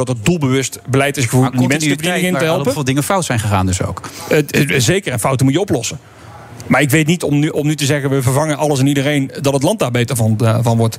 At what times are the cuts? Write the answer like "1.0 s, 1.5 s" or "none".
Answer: none